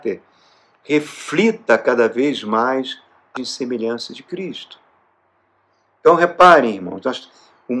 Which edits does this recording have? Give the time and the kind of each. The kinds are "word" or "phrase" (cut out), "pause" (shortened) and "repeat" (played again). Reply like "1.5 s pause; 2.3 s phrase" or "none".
3.4 s word